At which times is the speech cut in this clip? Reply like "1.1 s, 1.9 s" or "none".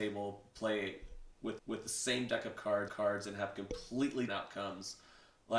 1.6 s, 2.9 s, 4.3 s